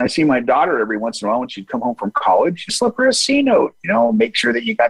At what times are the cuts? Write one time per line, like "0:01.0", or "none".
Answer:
0:02.7